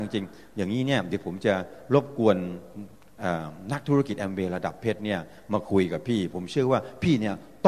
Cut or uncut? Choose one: uncut